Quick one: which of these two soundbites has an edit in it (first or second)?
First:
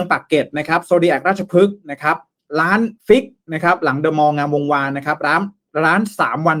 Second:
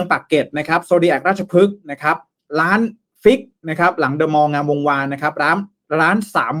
first